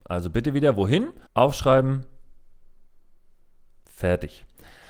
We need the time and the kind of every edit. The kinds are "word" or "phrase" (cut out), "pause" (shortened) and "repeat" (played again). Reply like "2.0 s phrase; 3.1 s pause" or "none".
1.3 s pause